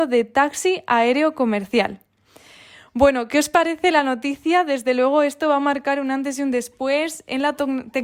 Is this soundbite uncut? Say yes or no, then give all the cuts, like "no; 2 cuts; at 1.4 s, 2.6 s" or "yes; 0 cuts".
yes; 0 cuts